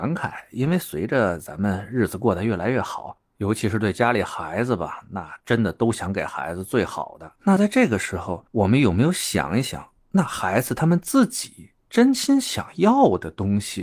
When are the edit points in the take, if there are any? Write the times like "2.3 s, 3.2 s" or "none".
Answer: 7.3 s